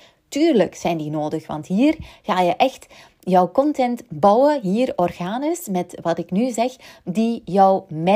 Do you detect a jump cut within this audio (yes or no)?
no